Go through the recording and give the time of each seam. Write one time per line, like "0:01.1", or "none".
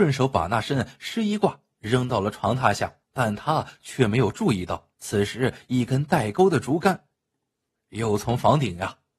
0:03.0
0:04.9